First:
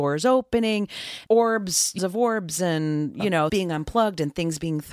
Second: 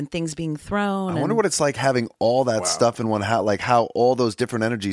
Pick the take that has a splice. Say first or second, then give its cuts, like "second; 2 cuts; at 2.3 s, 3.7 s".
first; 3 cuts; at 1.3 s, 2.0 s, 3.5 s